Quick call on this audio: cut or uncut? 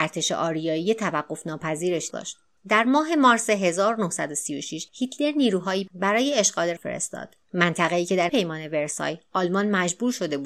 cut